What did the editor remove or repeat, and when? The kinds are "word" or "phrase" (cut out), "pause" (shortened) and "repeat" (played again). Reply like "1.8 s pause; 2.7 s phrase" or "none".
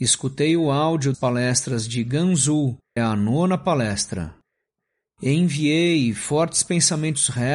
1.1 s word; 3.0 s phrase